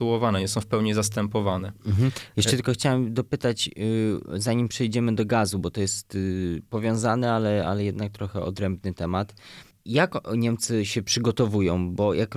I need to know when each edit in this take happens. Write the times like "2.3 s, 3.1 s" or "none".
none